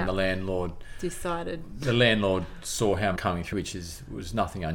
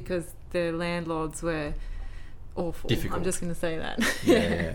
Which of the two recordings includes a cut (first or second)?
first